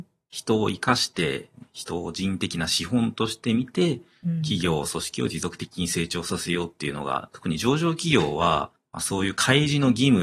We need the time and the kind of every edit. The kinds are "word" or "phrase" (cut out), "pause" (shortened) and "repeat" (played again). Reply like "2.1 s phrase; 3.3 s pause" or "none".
none